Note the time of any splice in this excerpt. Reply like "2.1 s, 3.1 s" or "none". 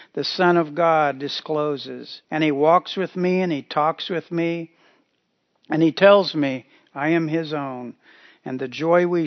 2.2 s